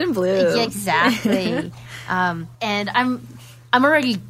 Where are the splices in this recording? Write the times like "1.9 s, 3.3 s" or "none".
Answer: 2.5 s